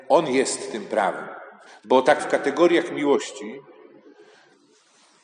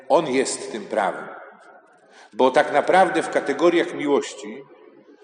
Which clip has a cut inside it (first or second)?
first